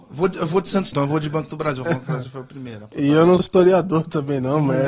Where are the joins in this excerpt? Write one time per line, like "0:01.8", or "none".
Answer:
0:00.9
0:01.9
0:03.4